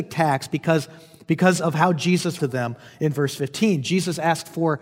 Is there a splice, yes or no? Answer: yes